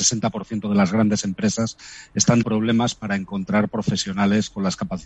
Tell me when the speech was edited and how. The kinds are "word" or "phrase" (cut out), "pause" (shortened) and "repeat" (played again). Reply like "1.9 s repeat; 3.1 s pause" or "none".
2.4 s word